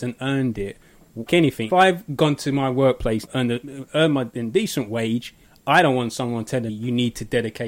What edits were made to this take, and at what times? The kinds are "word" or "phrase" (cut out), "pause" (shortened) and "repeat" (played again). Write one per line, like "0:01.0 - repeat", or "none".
0:01.3 - word
0:01.7 - word
0:03.3 - word
0:05.4 - pause
0:06.7 - word